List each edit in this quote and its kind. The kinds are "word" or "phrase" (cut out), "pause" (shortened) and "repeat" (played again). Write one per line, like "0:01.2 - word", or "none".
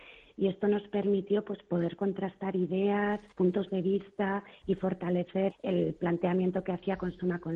0:03.3 - pause
0:05.5 - word